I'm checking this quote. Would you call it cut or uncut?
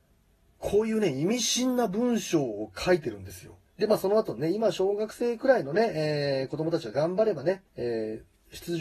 cut